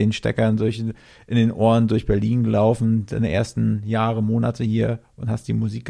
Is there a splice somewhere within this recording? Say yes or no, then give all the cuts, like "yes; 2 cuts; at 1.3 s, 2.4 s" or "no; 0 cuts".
no; 0 cuts